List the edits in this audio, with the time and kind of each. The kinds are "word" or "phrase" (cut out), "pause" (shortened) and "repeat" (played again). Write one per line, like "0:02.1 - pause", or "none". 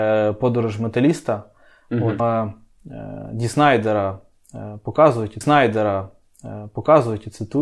0:02.2 - phrase
0:05.4 - repeat